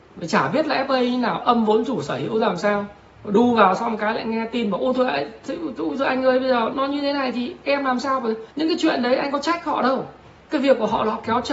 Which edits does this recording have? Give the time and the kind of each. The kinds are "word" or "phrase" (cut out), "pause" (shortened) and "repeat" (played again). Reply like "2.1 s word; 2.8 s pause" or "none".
6.7 s word; 8.5 s pause